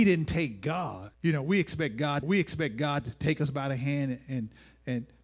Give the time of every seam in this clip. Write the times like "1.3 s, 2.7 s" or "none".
1.1 s, 2.2 s